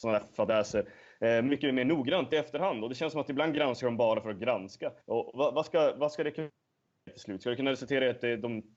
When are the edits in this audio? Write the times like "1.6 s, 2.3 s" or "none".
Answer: 5.0 s